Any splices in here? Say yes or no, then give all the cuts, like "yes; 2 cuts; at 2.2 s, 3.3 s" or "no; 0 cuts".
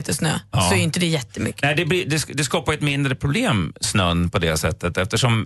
no; 0 cuts